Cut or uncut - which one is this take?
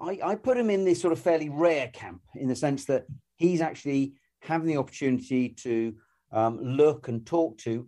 uncut